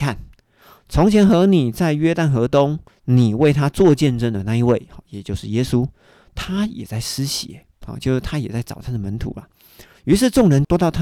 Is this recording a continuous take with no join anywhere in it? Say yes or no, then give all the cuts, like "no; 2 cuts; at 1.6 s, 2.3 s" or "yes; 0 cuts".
yes; 0 cuts